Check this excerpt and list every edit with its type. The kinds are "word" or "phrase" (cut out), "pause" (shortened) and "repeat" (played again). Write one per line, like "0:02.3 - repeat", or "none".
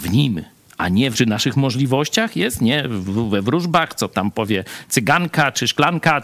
0:01.1 - phrase